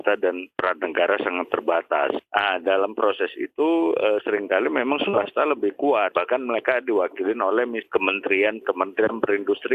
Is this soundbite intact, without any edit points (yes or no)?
no